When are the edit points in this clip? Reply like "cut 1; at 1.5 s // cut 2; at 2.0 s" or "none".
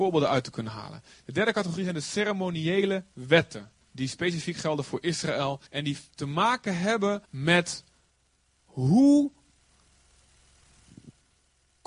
cut 1; at 3.8 s // cut 2; at 5.7 s // cut 3; at 7.2 s